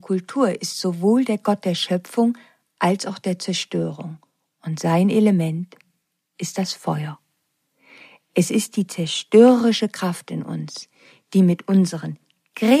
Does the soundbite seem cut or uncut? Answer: uncut